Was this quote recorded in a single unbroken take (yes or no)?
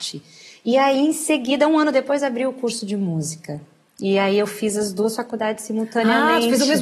yes